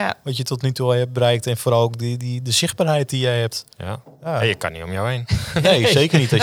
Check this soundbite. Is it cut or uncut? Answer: cut